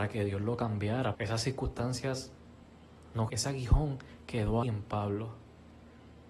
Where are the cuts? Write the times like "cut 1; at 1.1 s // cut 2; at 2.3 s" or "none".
cut 1; at 1.1 s // cut 2; at 3.3 s // cut 3; at 4.6 s